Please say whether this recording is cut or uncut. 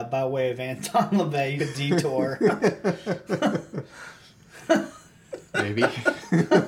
cut